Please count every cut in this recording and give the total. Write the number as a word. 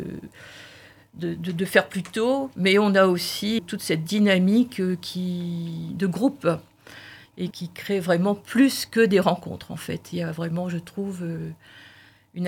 two